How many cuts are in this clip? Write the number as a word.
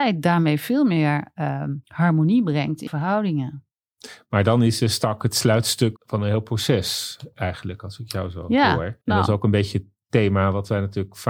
four